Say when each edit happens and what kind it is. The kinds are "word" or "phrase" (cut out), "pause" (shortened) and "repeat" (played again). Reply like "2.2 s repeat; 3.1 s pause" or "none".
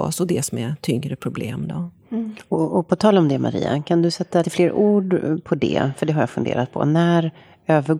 4.4 s word